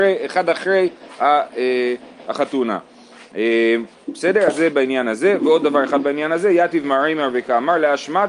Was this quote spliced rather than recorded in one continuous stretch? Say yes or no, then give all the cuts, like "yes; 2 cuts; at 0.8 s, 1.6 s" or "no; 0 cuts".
no; 0 cuts